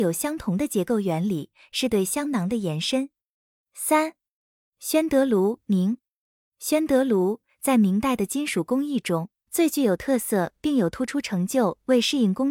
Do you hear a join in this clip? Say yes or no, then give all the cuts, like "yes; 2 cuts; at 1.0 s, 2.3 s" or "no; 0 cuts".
yes; 1 cut; at 5.6 s